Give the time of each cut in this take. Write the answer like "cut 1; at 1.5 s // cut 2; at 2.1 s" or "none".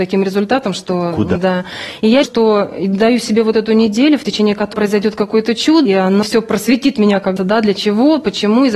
cut 1; at 1.4 s // cut 2; at 2.2 s // cut 3; at 4.7 s // cut 4; at 5.9 s // cut 5; at 6.2 s // cut 6; at 7.4 s